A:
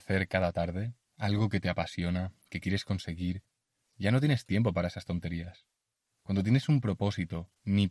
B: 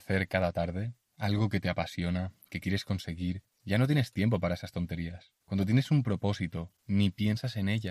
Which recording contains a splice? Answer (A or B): B